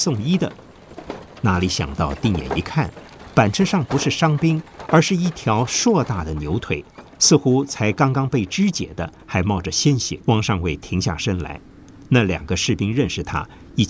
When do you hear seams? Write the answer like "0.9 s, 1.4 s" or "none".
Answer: 10.2 s